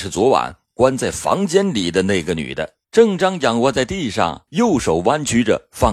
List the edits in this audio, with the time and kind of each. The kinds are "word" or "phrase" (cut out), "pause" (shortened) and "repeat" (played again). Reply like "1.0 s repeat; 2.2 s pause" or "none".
2.8 s pause; 4.5 s pause